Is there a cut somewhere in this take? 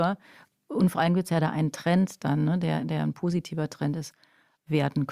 no; 0 cuts

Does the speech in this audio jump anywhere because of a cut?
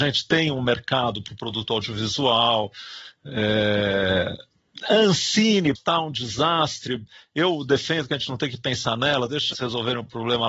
yes; 2 cuts; at 5.8 s, 9.5 s

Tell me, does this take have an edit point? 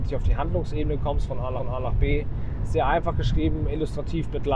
yes; 1 cut; at 1.6 s

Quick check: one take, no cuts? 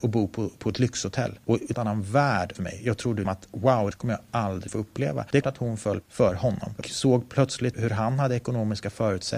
no; 9 cuts; at 1.7 s, 2.5 s, 3.2 s, 3.9 s, 4.7 s, 5.4 s, 6.0 s, 6.8 s, 7.7 s

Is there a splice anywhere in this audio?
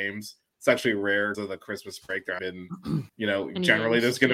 yes; 3 cuts; at 1.3 s, 2.4 s, 3.1 s

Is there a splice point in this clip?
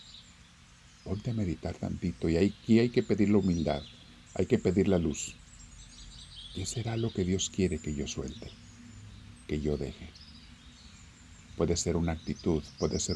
no; 0 cuts

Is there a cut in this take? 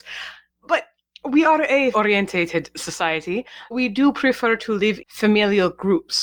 yes; 3 cuts; at 1.9 s, 3.7 s, 5.0 s

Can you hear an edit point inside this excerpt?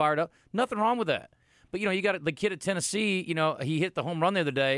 no; 0 cuts

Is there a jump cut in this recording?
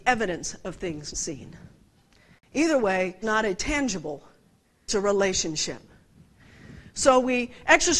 yes; 3 cuts; at 1.1 s, 3.2 s, 4.9 s

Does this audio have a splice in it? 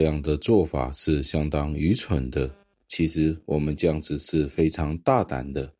no; 0 cuts

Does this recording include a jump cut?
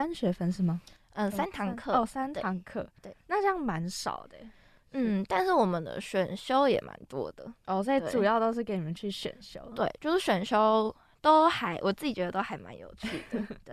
yes; 1 cut; at 7.6 s

